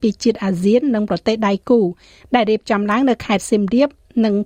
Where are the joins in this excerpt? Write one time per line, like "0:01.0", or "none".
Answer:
none